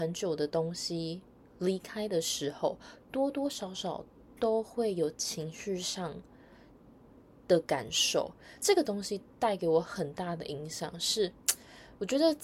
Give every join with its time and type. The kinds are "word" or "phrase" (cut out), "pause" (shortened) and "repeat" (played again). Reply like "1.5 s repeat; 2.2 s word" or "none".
none